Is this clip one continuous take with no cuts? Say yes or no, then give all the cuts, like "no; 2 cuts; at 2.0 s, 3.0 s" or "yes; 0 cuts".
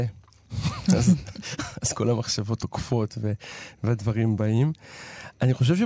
yes; 0 cuts